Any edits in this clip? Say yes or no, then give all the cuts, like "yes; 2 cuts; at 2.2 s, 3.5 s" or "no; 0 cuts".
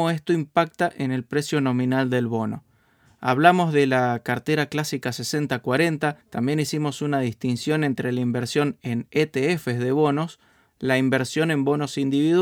yes; 2 cuts; at 6.2 s, 10.7 s